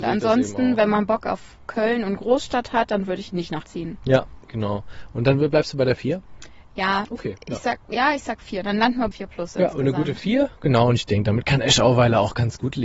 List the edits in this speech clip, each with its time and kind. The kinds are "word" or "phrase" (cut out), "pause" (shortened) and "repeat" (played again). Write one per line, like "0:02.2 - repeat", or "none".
0:03.6 - word
0:04.4 - pause
0:09.1 - word